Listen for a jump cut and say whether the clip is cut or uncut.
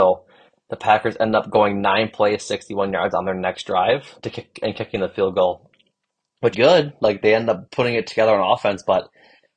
cut